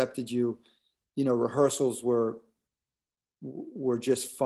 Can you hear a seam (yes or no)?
no